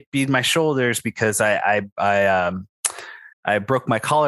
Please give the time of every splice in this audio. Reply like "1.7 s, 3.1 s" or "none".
3.3 s